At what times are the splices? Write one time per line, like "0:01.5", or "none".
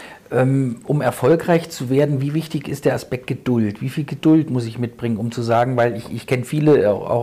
none

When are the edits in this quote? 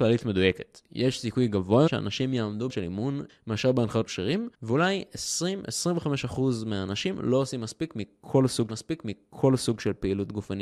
0:01.9
0:02.7
0:03.3
0:04.1
0:04.5
0:08.7

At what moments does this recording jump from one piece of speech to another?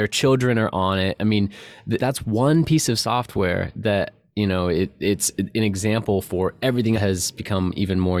0:02.0
0:06.9

